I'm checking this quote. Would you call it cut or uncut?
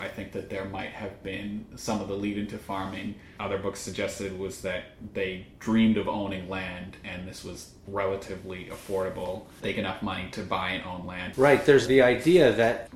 cut